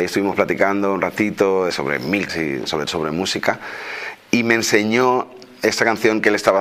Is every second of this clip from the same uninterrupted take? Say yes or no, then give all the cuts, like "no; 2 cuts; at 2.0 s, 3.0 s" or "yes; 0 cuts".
no; 3 cuts; at 1.7 s, 2.3 s, 2.9 s